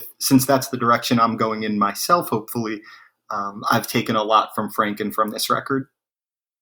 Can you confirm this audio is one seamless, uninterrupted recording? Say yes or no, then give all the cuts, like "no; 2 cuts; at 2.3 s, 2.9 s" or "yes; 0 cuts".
yes; 0 cuts